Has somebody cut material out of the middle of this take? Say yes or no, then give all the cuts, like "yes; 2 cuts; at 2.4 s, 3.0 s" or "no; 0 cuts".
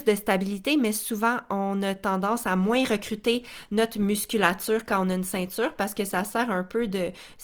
no; 0 cuts